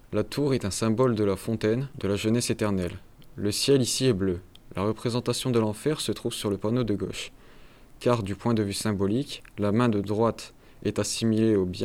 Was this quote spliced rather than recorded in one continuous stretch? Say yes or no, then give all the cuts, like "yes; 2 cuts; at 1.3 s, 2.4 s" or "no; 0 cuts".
no; 0 cuts